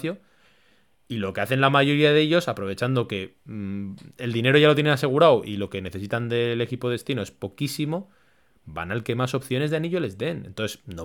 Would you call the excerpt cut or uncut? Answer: uncut